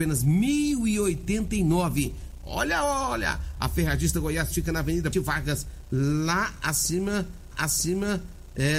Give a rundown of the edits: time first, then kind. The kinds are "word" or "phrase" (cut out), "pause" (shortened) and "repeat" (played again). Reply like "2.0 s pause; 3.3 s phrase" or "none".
5.1 s word; 7.5 s repeat